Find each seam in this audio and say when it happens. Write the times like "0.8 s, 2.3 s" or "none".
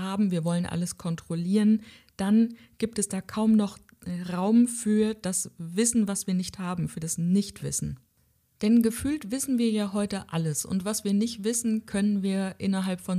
none